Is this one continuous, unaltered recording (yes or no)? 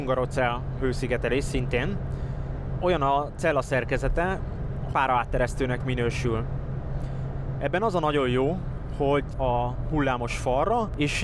no